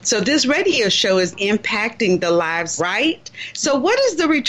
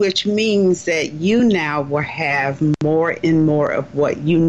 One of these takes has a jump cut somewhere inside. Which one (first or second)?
first